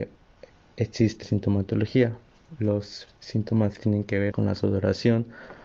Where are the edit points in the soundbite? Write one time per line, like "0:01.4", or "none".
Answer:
0:01.2
0:03.8
0:04.3